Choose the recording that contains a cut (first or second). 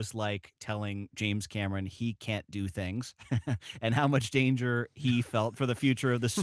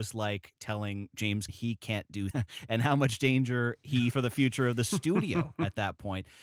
second